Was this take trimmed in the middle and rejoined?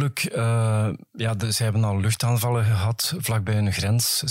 no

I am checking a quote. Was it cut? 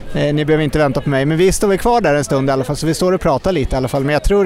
no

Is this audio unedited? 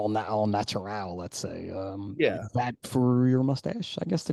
no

